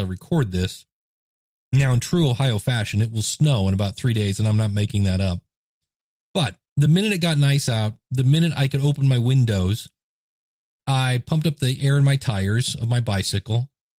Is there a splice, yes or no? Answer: no